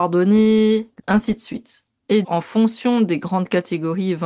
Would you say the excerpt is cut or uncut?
cut